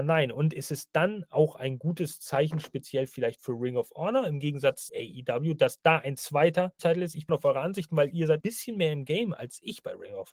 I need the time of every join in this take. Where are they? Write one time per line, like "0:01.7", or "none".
0:04.9
0:06.8
0:07.3
0:08.4